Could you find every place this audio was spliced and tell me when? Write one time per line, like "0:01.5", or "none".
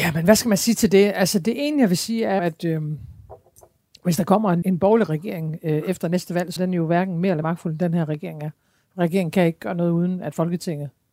0:02.4
0:04.6
0:06.6
0:07.4